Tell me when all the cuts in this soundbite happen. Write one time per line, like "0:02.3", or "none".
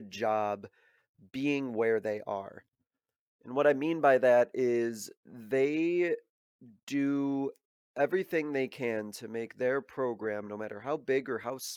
none